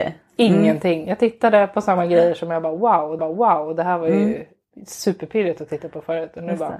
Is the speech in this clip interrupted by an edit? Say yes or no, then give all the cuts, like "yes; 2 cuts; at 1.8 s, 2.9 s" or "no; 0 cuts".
yes; 1 cut; at 3.2 s